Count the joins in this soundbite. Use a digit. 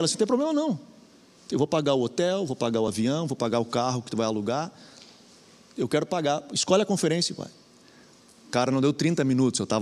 0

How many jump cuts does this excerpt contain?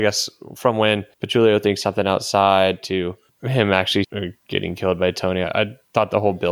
5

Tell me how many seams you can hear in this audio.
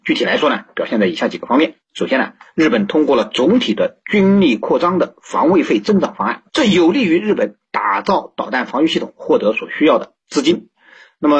1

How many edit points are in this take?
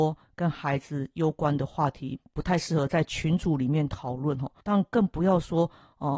1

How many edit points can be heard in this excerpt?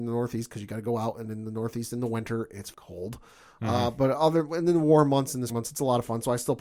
2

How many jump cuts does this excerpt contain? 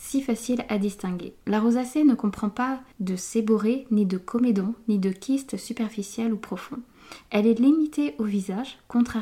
2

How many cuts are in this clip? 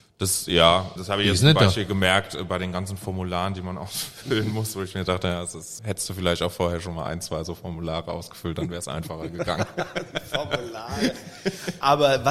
2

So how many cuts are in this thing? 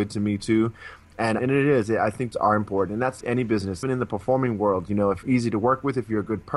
5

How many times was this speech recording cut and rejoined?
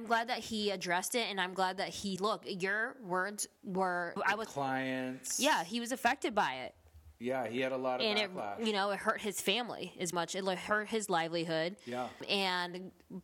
5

